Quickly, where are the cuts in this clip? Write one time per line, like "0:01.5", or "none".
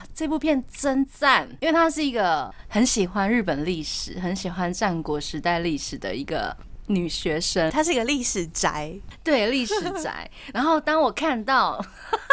0:07.7